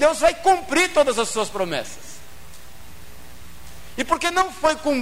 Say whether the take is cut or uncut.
uncut